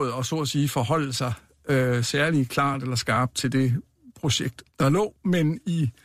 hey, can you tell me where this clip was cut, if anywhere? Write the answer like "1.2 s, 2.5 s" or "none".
4.7 s

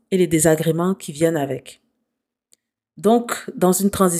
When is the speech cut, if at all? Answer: none

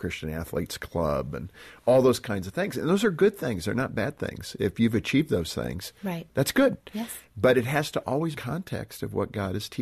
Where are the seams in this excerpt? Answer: 8.4 s

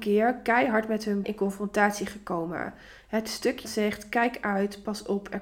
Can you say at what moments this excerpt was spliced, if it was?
1.2 s, 3.6 s

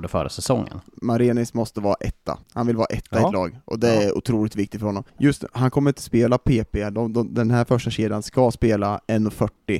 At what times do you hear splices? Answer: 2.4 s, 5.1 s

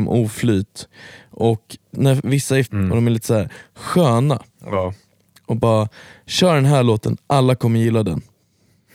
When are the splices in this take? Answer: 1.9 s, 2.6 s

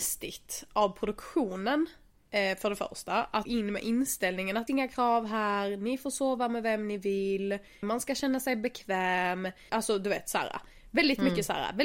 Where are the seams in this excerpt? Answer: 3.5 s, 4.7 s, 7.8 s, 9.7 s

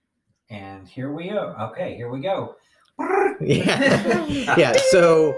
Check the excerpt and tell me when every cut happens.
none

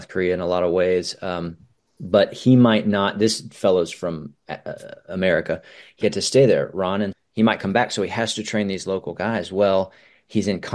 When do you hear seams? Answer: 1.8 s, 6.0 s, 7.1 s

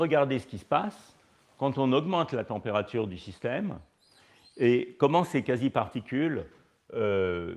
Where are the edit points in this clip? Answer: none

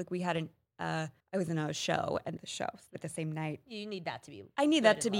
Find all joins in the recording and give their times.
1.2 s, 2.4 s, 3.0 s

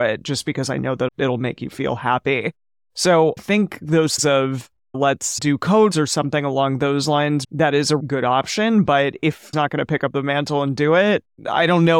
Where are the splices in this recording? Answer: 1.1 s, 3.4 s, 4.2 s, 5.4 s, 5.9 s, 7.4 s, 8.0 s, 9.5 s

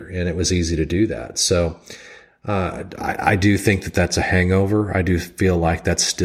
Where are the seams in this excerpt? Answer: none

